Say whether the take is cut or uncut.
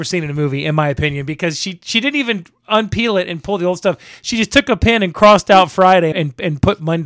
cut